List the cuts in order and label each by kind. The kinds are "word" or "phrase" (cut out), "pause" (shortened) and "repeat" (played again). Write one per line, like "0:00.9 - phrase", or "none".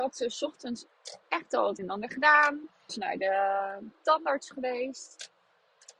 0:01.2 - pause
0:01.8 - word
0:02.9 - word